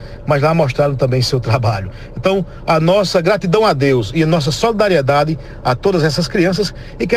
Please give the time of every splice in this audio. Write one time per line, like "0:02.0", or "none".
none